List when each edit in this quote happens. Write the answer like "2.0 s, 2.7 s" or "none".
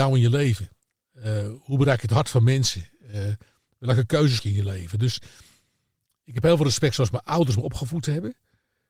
4.4 s